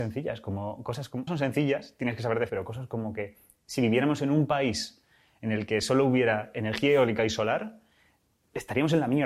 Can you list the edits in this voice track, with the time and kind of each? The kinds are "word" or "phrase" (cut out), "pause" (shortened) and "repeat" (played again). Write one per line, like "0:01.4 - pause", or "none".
0:01.3 - word
0:02.5 - word